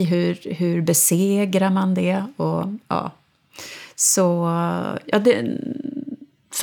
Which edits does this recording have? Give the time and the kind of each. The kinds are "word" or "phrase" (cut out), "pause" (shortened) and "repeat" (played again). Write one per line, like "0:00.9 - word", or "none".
none